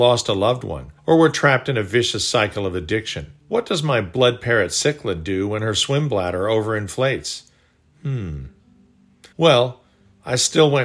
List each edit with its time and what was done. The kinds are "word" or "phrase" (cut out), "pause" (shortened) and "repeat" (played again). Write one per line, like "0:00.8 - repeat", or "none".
0:01.0 - pause
0:03.4 - pause
0:09.3 - pause